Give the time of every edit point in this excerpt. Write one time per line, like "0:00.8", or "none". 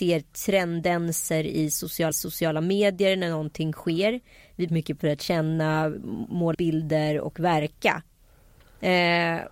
0:02.1
0:04.7
0:05.0
0:06.5